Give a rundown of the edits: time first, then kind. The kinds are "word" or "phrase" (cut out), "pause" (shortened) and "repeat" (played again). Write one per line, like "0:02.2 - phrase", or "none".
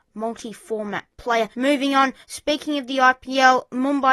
0:01.5 - pause
0:02.2 - pause